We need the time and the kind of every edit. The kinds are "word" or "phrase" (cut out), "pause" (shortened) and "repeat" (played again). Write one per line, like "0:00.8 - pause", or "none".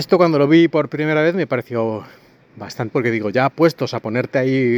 0:02.9 - word